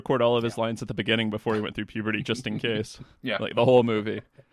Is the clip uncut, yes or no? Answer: yes